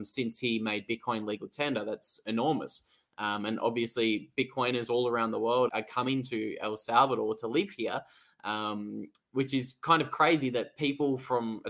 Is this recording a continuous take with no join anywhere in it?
no; 1 cut; at 5.7 s

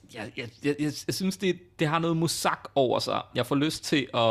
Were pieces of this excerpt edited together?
no; 0 cuts

